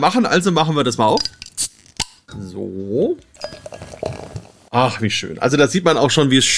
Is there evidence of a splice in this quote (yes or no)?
no